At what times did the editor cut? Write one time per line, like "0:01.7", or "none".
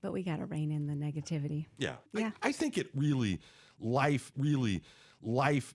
0:02.1
0:02.4
0:04.3